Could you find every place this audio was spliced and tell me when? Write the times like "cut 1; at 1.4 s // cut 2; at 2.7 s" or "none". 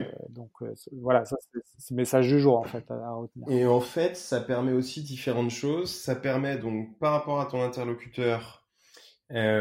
none